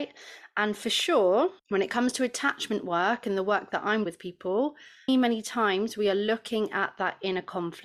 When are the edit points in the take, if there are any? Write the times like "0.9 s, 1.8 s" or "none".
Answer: 1.6 s, 4.1 s, 5.1 s

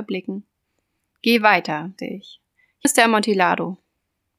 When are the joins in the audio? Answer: 2.0 s, 2.8 s

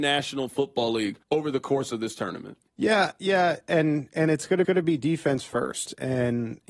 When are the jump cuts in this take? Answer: 1.2 s, 2.7 s, 4.6 s

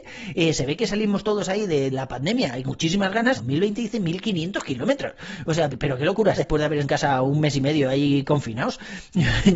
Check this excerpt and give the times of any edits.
1.9 s, 2.6 s, 3.4 s, 5.7 s, 6.4 s, 6.8 s

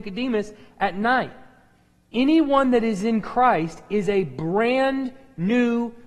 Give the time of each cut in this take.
none

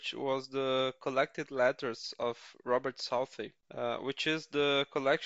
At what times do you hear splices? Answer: 3.6 s

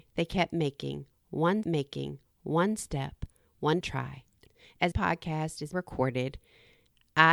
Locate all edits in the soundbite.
1.6 s, 3.8 s, 4.9 s, 5.7 s

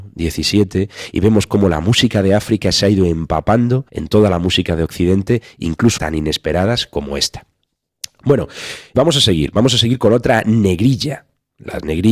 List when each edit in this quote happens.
3.9 s, 6.0 s, 8.9 s

